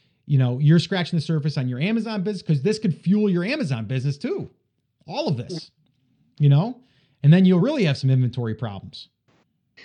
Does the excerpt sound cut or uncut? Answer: uncut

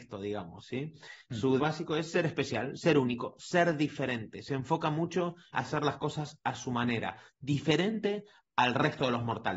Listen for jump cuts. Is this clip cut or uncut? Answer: cut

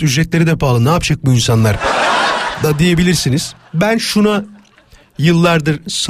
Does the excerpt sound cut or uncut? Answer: uncut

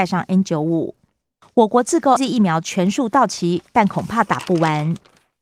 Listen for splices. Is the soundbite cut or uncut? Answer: cut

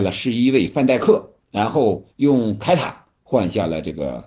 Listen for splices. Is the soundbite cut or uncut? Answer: cut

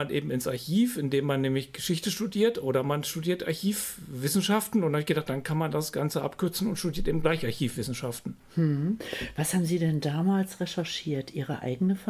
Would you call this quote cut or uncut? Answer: uncut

